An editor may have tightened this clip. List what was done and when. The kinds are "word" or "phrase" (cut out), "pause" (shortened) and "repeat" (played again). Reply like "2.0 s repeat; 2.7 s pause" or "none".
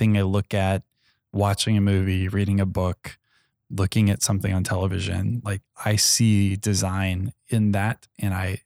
none